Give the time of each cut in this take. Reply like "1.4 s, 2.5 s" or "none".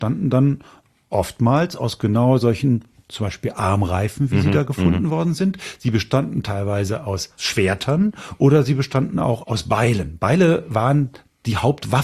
none